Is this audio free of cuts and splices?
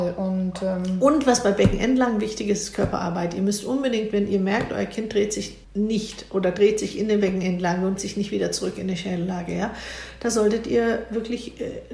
no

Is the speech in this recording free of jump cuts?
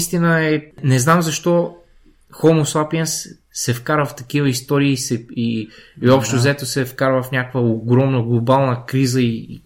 yes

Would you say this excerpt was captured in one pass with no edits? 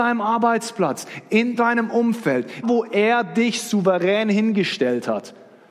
no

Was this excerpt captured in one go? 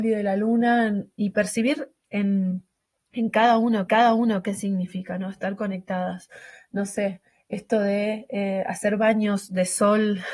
no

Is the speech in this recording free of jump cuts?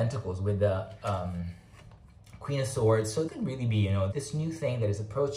no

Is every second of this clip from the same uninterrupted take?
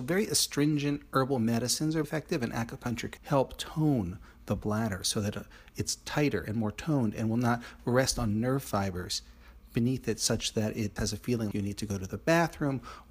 no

